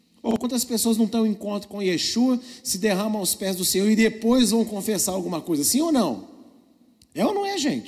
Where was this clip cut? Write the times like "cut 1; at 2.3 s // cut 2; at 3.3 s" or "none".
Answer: none

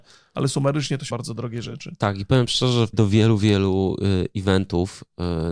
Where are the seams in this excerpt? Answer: cut 1; at 1.1 s // cut 2; at 2.9 s

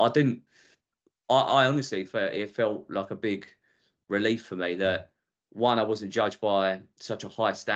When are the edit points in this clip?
none

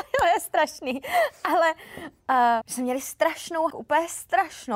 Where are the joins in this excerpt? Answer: cut 1; at 2.6 s // cut 2; at 3.7 s

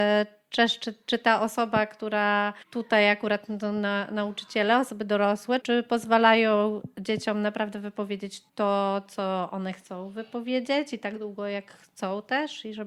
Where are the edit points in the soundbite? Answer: cut 1; at 2.6 s // cut 2; at 5.6 s // cut 3; at 8.5 s

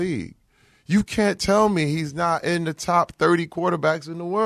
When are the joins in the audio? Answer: none

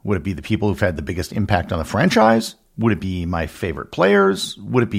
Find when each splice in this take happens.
none

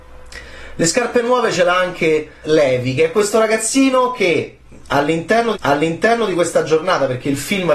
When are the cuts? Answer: cut 1; at 2.4 s // cut 2; at 5.5 s

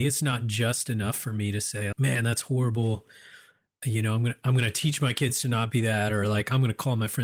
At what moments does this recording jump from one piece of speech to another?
cut 1; at 1.9 s

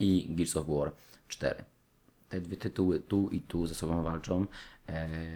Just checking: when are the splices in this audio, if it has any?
none

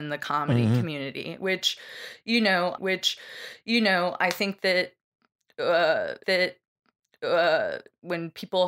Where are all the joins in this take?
cut 1; at 2.8 s // cut 2; at 6.2 s

